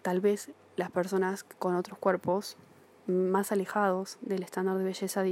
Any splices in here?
no; 0 cuts

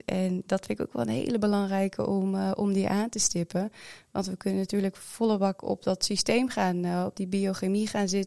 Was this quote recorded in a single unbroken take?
yes; 0 cuts

